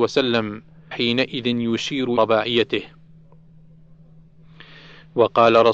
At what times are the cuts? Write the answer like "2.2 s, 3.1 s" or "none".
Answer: 0.9 s, 2.2 s